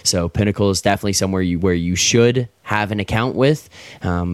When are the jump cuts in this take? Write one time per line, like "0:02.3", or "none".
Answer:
none